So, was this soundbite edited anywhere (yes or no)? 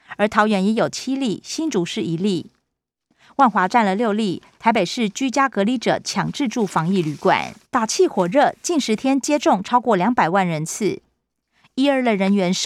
yes